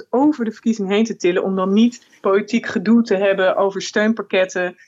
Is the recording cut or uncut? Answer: cut